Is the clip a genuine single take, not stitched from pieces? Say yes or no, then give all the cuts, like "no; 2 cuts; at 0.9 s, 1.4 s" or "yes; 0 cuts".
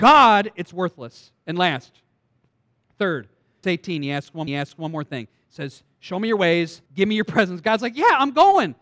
no; 3 cuts; at 3.6 s, 4.5 s, 6.9 s